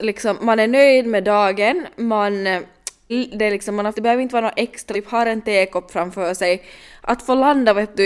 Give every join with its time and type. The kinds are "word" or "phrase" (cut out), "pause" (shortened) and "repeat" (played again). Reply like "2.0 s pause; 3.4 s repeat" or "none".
3.1 s word; 3.9 s phrase; 4.9 s word